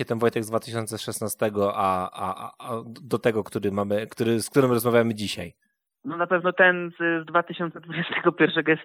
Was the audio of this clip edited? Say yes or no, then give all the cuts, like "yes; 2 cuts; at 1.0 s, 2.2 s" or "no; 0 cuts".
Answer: no; 0 cuts